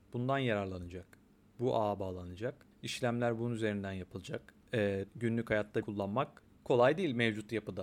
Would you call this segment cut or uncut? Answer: cut